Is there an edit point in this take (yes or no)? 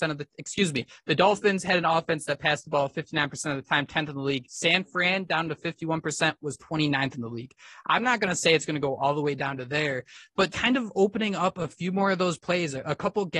yes